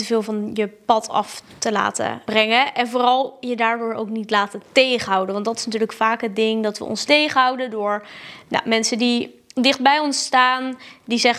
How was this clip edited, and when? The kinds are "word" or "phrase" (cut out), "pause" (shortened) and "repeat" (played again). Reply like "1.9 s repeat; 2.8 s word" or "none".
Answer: 2.3 s word; 7.1 s word